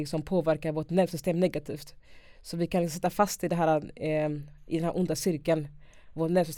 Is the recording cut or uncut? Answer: uncut